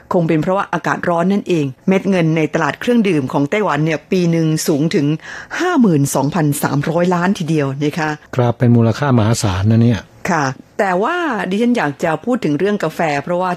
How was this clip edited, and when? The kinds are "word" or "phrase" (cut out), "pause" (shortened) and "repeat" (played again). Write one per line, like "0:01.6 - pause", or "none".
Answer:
0:01.8 - pause